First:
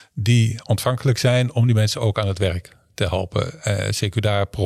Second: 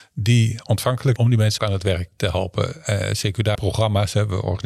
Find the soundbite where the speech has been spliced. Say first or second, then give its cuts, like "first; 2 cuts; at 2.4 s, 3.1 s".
second; 4 cuts; at 1.2 s, 1.6 s, 2.1 s, 3.5 s